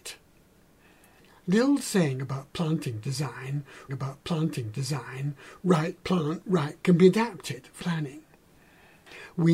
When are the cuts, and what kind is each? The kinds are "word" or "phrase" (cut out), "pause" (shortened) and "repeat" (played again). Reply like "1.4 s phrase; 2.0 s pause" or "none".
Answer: 3.9 s repeat; 6.8 s word; 7.8 s word